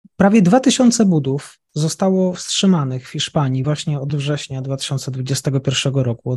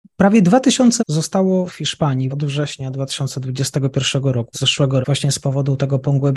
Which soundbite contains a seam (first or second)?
second